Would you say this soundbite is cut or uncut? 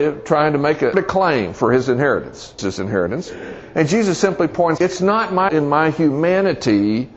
cut